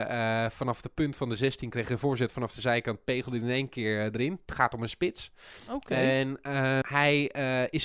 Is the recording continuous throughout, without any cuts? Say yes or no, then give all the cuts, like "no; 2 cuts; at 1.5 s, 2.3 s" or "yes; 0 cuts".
no; 1 cut; at 6.8 s